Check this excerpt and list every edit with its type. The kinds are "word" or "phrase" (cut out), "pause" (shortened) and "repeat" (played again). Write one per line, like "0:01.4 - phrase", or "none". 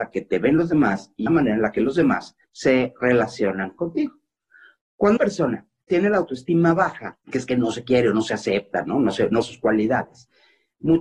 0:01.3 - word
0:02.4 - pause
0:05.2 - word
0:07.2 - pause
0:09.4 - word